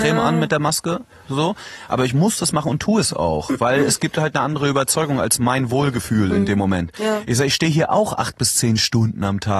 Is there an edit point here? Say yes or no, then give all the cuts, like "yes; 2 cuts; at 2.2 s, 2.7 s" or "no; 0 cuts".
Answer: no; 0 cuts